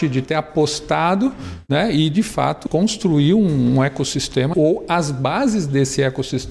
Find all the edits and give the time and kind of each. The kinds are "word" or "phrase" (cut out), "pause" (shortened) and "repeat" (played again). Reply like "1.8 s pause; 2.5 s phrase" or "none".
2.7 s phrase; 4.5 s word